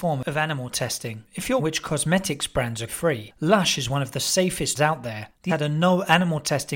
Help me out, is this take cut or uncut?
cut